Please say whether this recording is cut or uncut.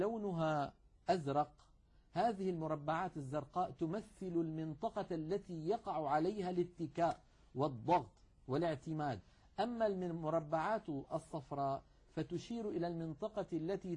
uncut